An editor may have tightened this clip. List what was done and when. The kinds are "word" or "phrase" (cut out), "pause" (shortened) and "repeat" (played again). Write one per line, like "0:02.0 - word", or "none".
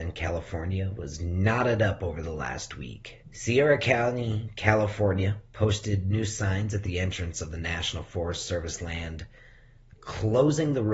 0:03.2 - pause
0:05.5 - pause